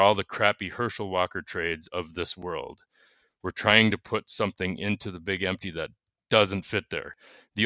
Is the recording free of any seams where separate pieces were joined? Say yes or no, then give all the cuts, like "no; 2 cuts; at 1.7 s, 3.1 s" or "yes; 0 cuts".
yes; 0 cuts